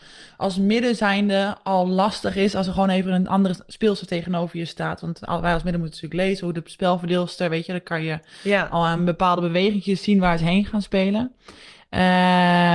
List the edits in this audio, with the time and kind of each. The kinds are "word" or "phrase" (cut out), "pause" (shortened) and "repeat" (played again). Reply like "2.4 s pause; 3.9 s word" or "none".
none